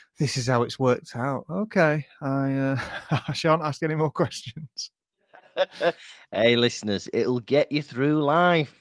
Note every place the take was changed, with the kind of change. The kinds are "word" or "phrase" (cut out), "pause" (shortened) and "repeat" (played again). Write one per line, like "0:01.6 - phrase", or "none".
none